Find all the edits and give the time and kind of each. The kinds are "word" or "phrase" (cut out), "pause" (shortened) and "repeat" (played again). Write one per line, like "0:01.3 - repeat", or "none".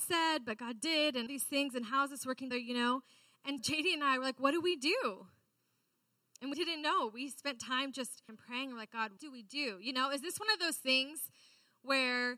0:01.3 - word
0:02.5 - word
0:03.6 - word
0:06.5 - word
0:08.3 - word
0:09.2 - word